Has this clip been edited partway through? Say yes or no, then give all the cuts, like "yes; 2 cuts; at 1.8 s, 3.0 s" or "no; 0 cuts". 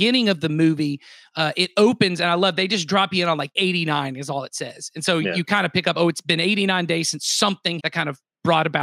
yes; 2 cuts; at 3.6 s, 7.8 s